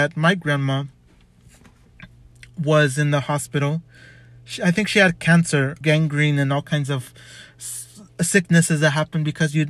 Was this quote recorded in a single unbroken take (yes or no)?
no